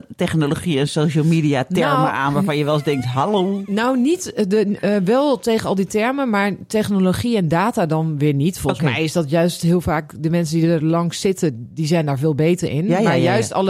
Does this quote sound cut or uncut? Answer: uncut